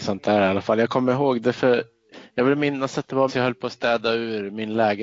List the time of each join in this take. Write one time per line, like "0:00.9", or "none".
0:03.3